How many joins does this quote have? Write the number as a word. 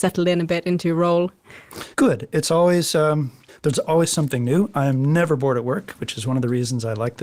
one